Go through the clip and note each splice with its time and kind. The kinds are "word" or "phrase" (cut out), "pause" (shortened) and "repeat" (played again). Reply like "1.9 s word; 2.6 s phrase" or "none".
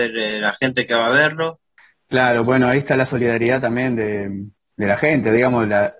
none